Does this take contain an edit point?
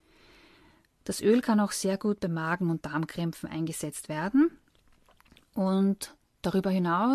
no; 0 cuts

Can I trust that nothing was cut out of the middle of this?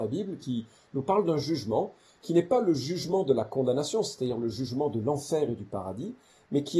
yes; 0 cuts

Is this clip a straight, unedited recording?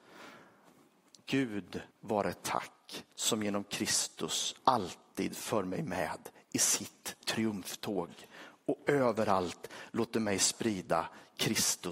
no; 3 cuts; at 1.9 s, 3.1 s, 4.6 s

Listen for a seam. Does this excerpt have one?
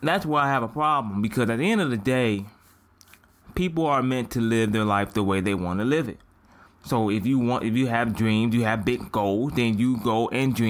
no; 0 cuts

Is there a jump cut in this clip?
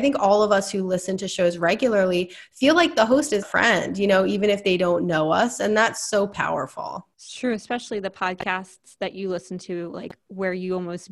yes; 2 cuts; at 3.4 s, 7.1 s

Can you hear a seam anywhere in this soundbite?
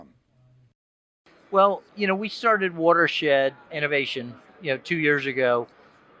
yes; 1 cut; at 3.7 s

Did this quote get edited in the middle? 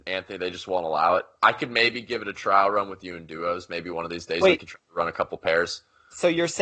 no; 0 cuts

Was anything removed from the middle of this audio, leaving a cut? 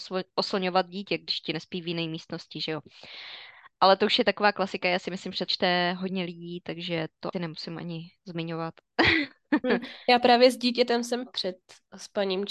yes; 3 cuts; at 5.5 s, 7.3 s, 11.3 s

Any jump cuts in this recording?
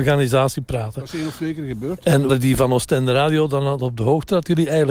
yes; 1 cut; at 2.3 s

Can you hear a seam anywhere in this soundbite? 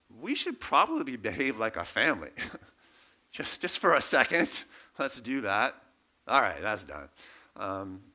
no; 0 cuts

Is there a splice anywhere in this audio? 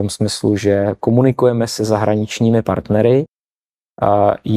no; 0 cuts

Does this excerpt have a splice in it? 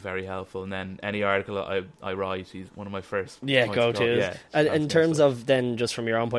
yes; 1 cut; at 2.7 s

